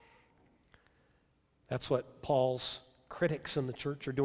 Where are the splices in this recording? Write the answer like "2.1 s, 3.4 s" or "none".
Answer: none